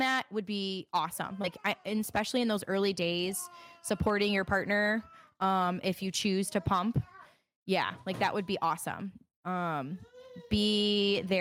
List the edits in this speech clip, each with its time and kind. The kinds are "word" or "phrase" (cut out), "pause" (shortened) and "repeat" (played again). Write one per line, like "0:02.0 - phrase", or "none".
none